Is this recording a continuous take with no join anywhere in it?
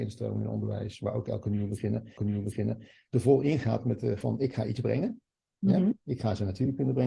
no; 3 cuts; at 2.2 s, 4.2 s, 6.0 s

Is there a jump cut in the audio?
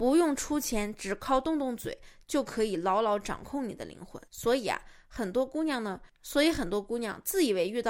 yes; 1 cut; at 4.3 s

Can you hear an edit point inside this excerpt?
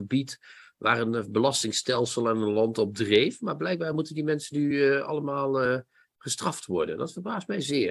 no; 0 cuts

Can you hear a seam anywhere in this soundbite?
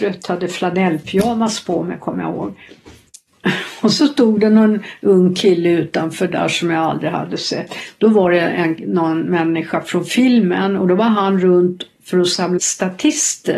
yes; 1 cut; at 12.6 s

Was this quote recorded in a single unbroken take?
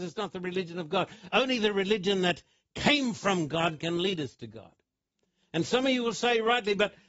yes; 0 cuts

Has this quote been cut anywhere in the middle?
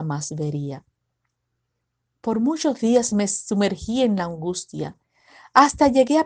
no; 0 cuts

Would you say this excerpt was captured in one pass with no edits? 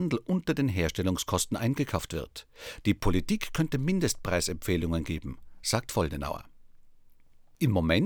yes; 0 cuts

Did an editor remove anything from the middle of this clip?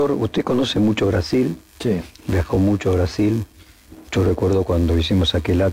no; 0 cuts

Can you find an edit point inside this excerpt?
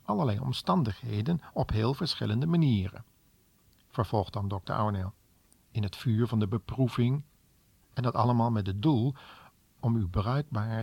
no; 0 cuts

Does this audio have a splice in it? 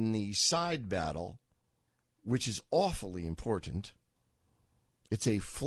no; 0 cuts

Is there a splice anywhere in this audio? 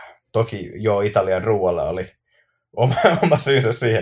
no; 0 cuts

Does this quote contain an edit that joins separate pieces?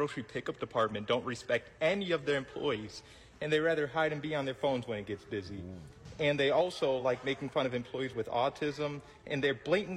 no; 0 cuts

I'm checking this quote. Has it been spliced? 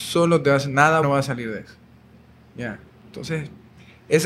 yes; 1 cut; at 1.0 s

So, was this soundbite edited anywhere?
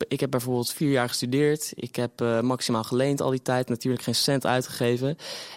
no; 0 cuts

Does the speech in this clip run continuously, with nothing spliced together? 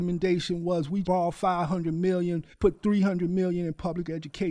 no; 2 cuts; at 1.0 s, 2.5 s

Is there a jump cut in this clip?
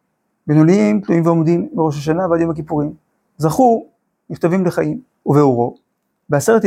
yes; 1 cut; at 5.1 s

